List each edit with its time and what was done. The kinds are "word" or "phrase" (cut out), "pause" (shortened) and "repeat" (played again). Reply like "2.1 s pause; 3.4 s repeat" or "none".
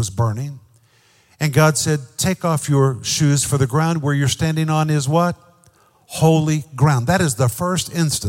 none

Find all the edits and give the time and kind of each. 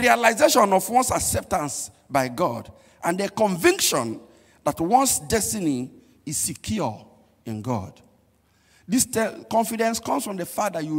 none

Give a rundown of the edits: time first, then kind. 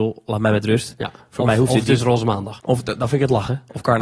2.6 s pause

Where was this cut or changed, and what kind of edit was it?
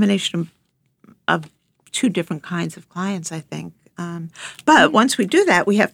none

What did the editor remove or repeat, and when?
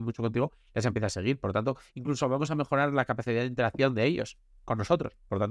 none

